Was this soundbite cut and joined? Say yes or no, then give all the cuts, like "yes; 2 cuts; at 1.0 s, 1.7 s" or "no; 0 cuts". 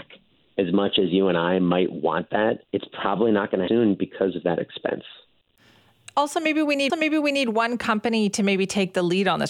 yes; 3 cuts; at 2.6 s, 3.7 s, 6.9 s